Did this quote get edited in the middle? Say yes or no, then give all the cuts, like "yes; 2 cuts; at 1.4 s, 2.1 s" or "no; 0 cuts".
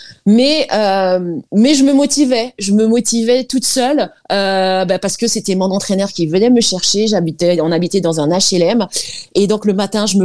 yes; 2 cuts; at 1.5 s, 4.2 s